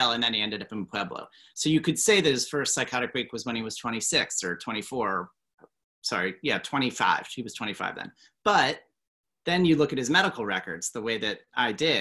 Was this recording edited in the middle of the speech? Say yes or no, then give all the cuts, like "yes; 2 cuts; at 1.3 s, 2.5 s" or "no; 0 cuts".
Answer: no; 0 cuts